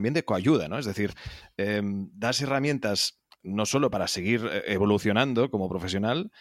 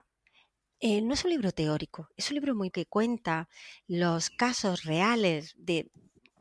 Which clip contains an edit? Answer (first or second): second